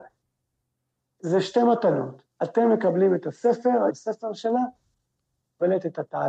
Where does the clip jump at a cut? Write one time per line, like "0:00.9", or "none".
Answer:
0:02.3
0:03.9

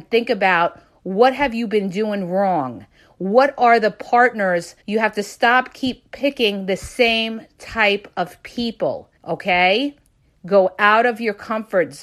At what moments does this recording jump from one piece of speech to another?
0:04.8
0:09.2

